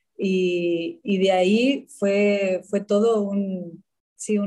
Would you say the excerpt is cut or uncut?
uncut